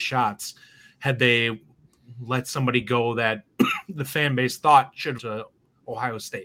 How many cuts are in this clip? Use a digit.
1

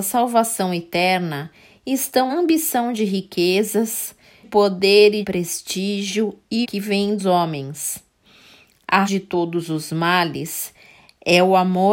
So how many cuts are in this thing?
6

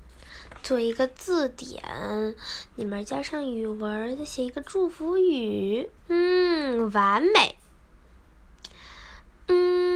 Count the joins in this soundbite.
1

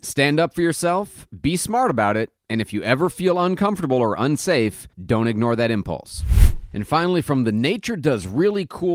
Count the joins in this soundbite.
1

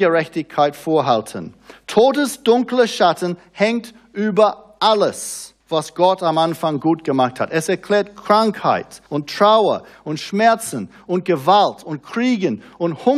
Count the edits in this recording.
2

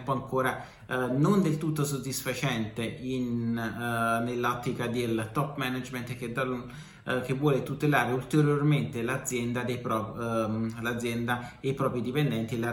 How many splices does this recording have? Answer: 0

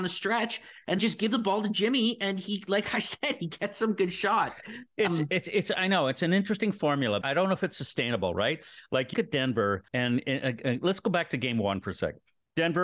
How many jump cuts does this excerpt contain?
5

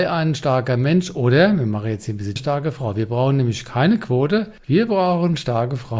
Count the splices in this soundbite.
1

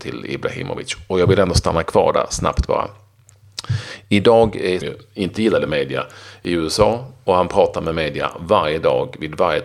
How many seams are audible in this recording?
1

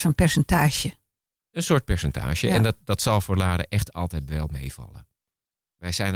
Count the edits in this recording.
0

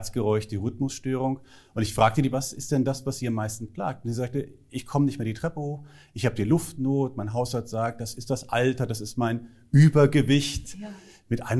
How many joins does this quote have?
1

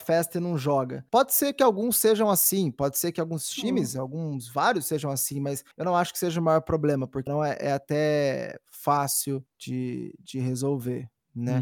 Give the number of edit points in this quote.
4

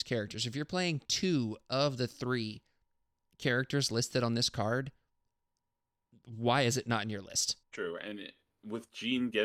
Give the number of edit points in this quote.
1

